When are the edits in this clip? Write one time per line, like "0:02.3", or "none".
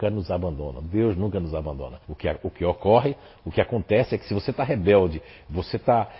0:02.0